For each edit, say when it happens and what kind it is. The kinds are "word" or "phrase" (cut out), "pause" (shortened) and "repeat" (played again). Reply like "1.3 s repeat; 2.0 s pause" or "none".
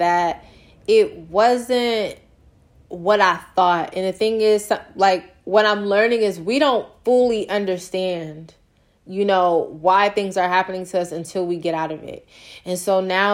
none

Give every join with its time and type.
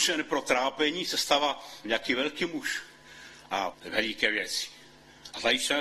1.8 s word; 3.7 s word

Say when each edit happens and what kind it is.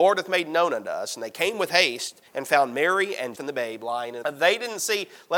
2.3 s pause; 3.3 s word; 4.2 s phrase

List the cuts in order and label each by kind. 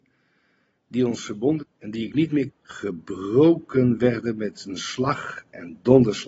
1.6 s word; 2.5 s word

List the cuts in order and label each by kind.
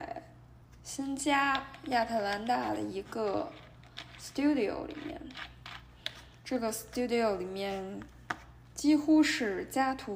none

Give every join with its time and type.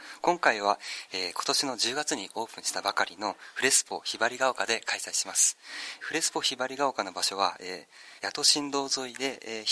6.0 s phrase; 8.2 s pause

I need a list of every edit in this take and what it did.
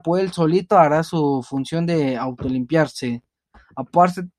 none

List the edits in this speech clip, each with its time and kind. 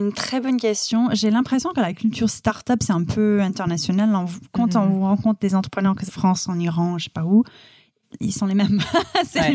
6.1 s phrase

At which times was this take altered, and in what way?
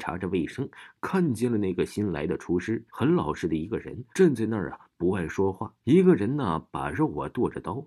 2.9 s pause; 4.1 s pause; 5.8 s pause

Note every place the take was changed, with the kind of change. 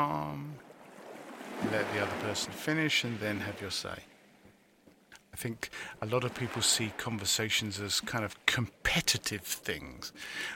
none

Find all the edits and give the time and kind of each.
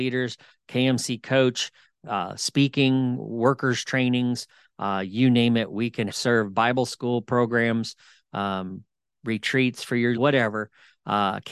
6.1 s word; 10.1 s word

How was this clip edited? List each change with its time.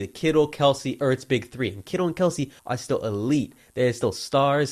2.6 s pause

